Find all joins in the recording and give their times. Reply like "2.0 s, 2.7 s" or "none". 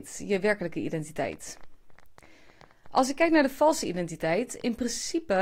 none

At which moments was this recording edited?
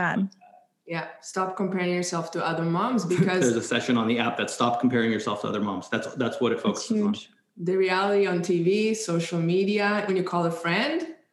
10.1 s

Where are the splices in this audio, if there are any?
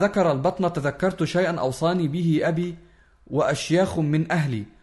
none

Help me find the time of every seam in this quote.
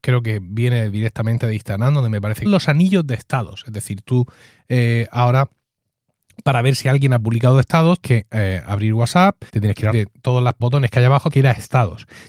2.5 s, 8.0 s, 9.5 s, 9.9 s, 10.6 s, 11.3 s

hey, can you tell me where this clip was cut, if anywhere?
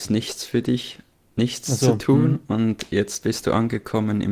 none

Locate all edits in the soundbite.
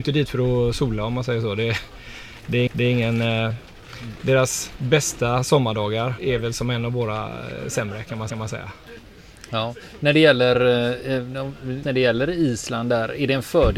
2.7 s, 6.2 s, 8.3 s, 11.8 s

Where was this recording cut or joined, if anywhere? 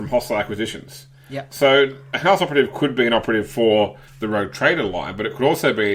4.1 s

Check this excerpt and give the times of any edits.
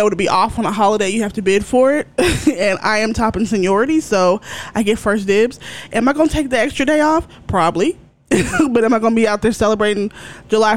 none

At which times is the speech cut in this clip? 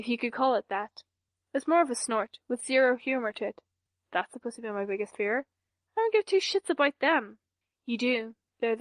none

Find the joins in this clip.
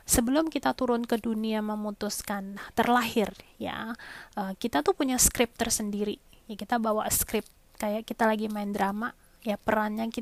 none

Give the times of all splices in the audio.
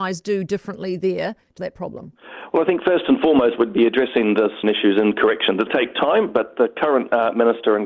1.6 s, 4.6 s, 5.7 s

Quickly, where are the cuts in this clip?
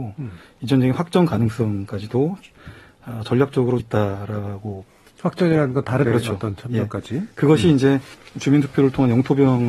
3.8 s, 6.1 s, 8.1 s

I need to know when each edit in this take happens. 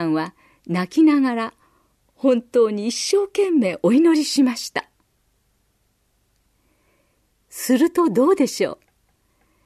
none

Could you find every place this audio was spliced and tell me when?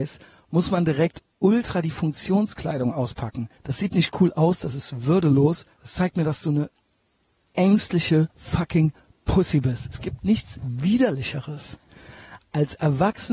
3.6 s, 5.7 s, 8.3 s

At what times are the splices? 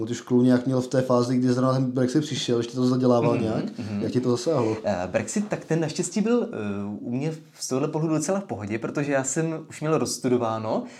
none

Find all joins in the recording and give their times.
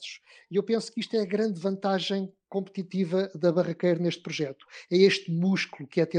none

